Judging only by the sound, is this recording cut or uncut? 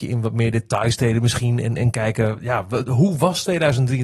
uncut